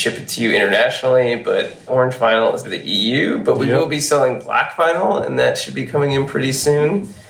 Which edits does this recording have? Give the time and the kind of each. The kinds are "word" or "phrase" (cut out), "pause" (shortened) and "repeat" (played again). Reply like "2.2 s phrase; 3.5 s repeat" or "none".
1.9 s word; 2.6 s phrase